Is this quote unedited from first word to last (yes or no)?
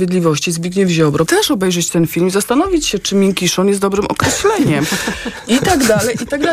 no